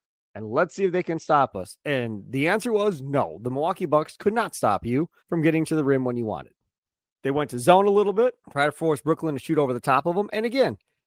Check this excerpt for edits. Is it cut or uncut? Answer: cut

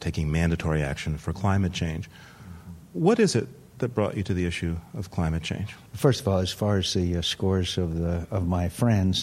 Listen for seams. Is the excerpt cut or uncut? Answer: cut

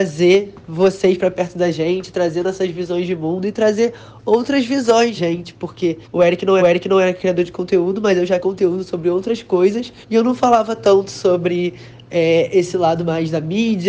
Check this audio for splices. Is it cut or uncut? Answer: cut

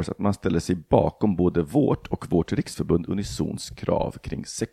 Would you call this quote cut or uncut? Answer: uncut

